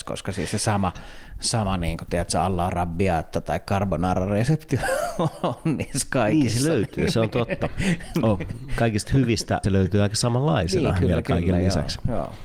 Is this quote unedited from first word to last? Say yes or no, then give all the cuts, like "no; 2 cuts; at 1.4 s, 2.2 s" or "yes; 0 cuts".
no; 1 cut; at 9.6 s